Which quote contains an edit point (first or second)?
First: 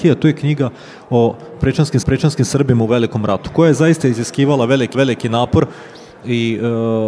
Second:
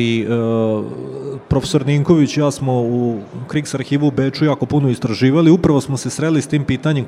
first